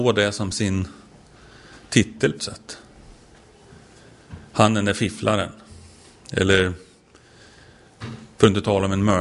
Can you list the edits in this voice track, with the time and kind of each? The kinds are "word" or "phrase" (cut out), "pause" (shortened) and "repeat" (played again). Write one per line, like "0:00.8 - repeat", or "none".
0:02.4 - word

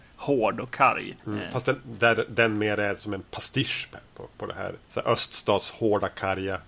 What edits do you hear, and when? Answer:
0:01.2 - pause
0:03.9 - word
0:04.8 - pause

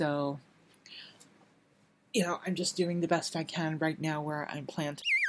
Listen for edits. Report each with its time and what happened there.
none

